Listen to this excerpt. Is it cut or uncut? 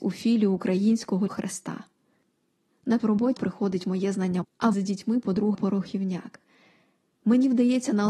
cut